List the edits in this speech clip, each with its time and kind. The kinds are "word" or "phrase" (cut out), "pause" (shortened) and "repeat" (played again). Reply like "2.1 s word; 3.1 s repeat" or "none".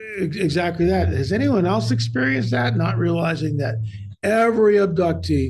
none